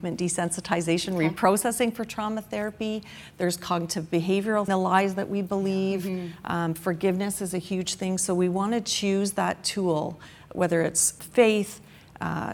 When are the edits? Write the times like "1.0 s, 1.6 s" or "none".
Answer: 4.7 s, 11.2 s